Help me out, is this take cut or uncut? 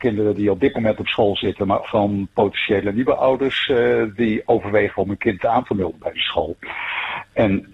cut